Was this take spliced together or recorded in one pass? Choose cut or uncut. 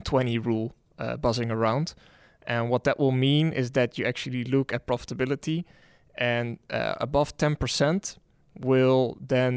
uncut